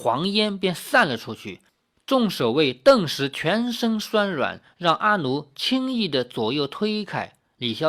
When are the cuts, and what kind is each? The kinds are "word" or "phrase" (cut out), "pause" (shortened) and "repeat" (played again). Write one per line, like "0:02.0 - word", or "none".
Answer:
none